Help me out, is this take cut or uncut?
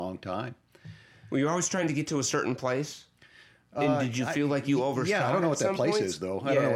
uncut